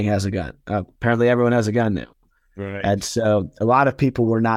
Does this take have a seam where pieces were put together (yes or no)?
no